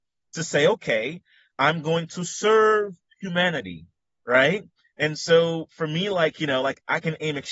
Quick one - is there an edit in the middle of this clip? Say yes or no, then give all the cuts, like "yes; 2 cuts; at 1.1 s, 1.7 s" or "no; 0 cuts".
no; 0 cuts